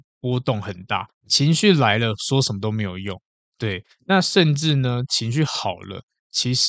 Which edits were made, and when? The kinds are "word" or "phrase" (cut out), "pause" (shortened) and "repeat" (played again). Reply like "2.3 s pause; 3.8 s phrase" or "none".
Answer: 1.1 s pause